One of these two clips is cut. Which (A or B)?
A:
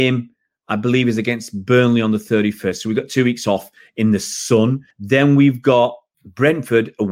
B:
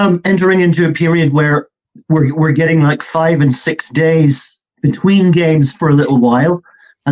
A